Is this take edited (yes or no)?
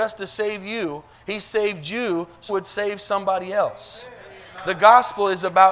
yes